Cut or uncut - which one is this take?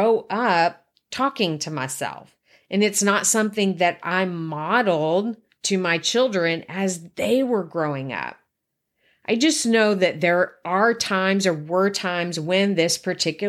uncut